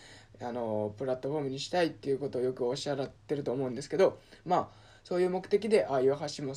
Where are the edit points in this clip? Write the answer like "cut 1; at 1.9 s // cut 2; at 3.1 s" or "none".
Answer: cut 1; at 3.2 s